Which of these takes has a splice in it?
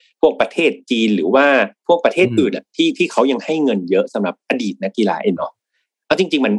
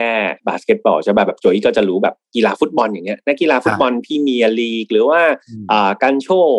first; 1 cut; at 5.4 s

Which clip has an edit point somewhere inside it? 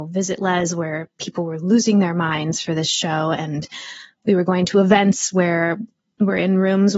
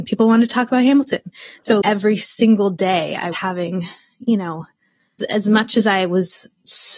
second; 3 cuts; at 1.8 s, 3.3 s, 5.2 s

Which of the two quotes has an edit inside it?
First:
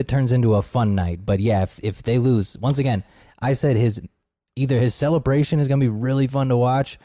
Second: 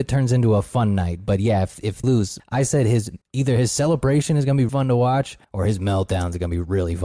second; 5 cuts; at 2.0 s, 2.4 s, 3.2 s, 4.7 s, 5.4 s

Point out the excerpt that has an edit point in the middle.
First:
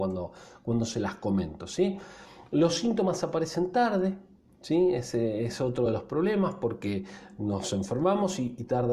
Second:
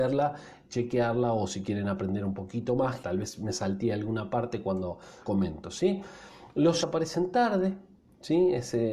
second; 3 cuts; at 3.0 s, 5.2 s, 6.8 s

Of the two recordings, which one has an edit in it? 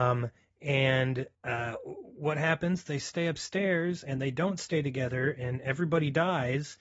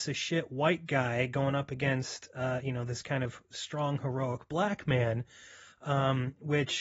first; 1 cut; at 1.3 s

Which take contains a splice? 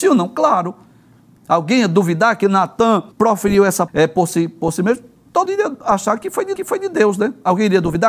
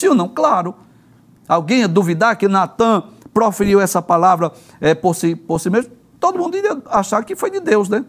first; 4 cuts; at 3.1 s, 3.9 s, 5.5 s, 6.6 s

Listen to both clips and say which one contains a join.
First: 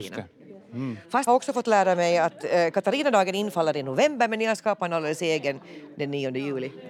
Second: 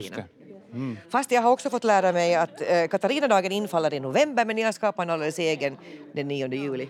first; 1 cut; at 1.3 s

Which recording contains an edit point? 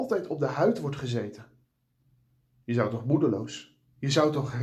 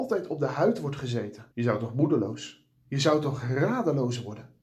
second; 1 cut; at 1.5 s

